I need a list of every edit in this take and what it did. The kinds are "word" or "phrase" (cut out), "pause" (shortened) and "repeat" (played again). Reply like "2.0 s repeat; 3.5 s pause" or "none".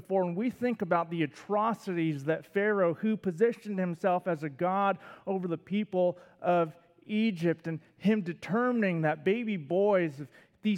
none